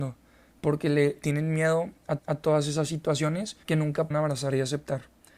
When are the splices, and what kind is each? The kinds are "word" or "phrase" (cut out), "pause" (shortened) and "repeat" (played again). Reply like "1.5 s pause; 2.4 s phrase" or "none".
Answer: 1.2 s word; 2.2 s repeat; 3.6 s pause; 4.1 s word